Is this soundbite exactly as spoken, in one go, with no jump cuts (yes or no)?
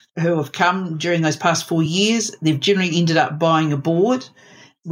yes